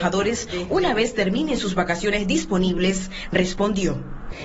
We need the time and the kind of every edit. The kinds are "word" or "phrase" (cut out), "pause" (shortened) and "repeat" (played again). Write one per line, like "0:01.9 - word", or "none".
none